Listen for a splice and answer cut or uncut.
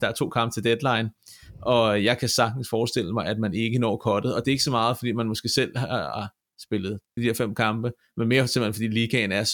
cut